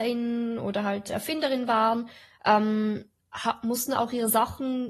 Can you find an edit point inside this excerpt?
no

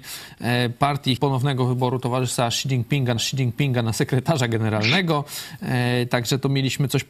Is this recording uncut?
no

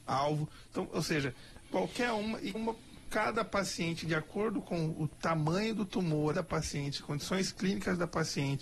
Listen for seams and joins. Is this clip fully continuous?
no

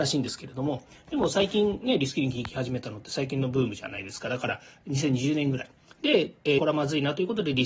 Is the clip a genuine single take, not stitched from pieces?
no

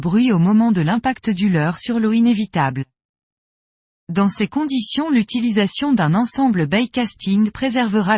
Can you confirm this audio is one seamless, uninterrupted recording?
yes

